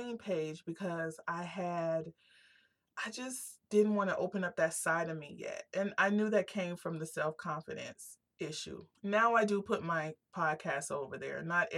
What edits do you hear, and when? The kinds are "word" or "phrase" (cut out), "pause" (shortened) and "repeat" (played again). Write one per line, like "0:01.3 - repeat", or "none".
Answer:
0:03.6 - pause
0:08.9 - pause